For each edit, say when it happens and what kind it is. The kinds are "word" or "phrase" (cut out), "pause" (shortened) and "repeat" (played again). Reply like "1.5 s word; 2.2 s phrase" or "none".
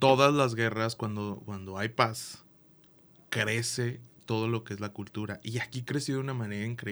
none